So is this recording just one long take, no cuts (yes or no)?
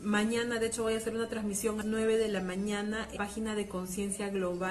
no